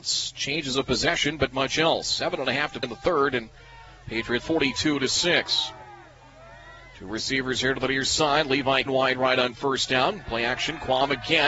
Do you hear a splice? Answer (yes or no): yes